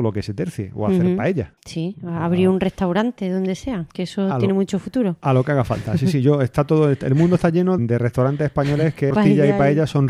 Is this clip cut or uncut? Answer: cut